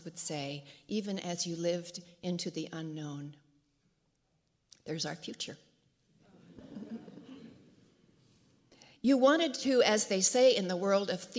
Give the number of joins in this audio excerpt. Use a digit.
0